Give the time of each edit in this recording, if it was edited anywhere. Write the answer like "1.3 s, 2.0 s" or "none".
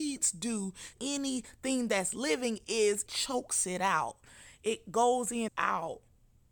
0.9 s, 3.1 s, 5.5 s